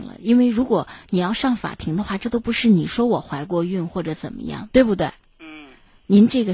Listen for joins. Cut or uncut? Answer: uncut